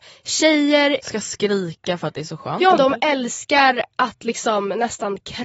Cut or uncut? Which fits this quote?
cut